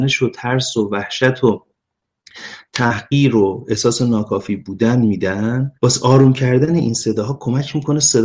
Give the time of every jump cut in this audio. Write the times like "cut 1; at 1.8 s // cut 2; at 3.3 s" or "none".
cut 1; at 5.7 s